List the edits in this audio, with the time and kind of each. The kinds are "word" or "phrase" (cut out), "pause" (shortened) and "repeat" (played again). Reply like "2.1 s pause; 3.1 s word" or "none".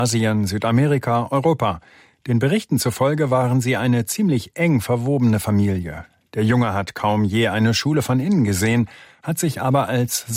none

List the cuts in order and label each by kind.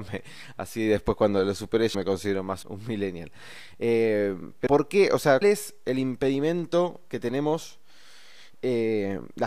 1.9 s word; 2.6 s word; 4.7 s word; 5.4 s word

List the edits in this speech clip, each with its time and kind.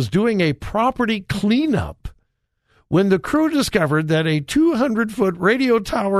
none

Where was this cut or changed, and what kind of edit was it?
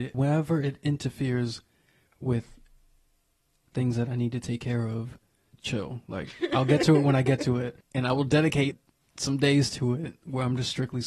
none

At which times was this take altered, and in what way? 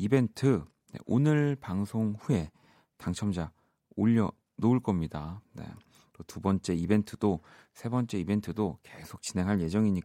none

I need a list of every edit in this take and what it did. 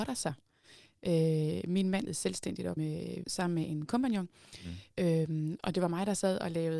2.1 s word; 2.8 s word; 3.2 s word

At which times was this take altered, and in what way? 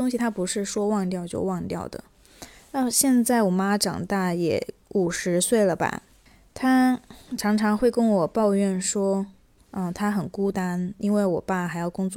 9.6 s pause

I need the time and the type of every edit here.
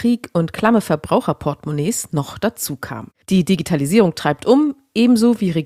3.2 s pause

